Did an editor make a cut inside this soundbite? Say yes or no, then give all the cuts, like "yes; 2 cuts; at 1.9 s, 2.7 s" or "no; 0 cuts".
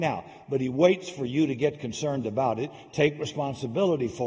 no; 0 cuts